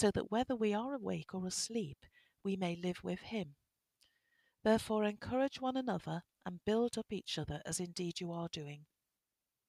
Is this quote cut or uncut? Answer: uncut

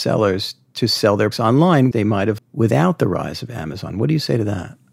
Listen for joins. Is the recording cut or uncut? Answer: cut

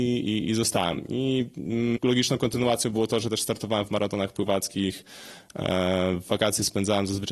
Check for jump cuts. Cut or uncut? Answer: cut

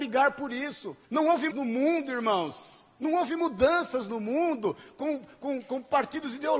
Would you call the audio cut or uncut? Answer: cut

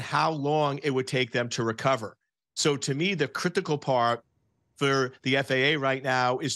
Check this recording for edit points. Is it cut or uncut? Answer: uncut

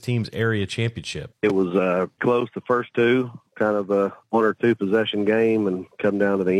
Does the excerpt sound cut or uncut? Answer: cut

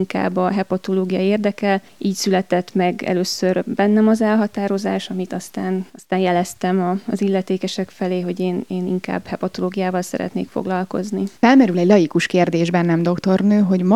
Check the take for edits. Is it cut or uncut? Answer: cut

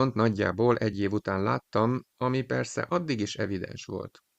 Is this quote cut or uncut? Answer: uncut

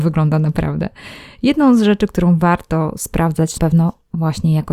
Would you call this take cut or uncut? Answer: cut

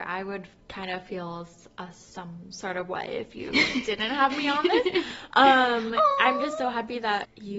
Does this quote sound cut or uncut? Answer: uncut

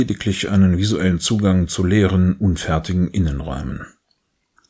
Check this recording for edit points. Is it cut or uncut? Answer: uncut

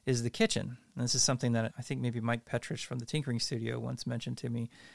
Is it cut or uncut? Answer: cut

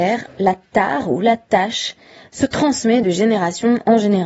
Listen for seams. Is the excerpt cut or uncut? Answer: uncut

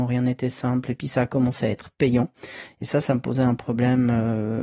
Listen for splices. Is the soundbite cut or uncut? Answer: uncut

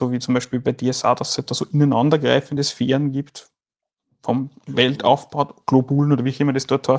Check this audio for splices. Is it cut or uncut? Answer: uncut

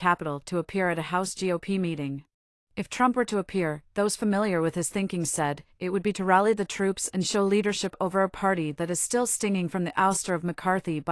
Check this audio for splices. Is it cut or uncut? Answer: cut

